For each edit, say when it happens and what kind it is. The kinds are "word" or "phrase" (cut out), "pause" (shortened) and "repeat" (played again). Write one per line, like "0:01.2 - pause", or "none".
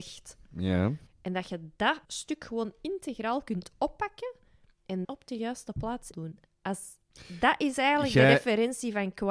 0:01.1 - pause
0:02.0 - pause
0:05.0 - phrase
0:06.1 - phrase